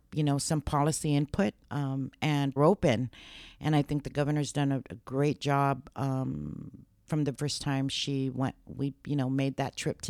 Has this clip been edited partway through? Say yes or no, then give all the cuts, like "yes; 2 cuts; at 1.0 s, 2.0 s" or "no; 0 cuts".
yes; 3 cuts; at 1.6 s, 2.6 s, 7.3 s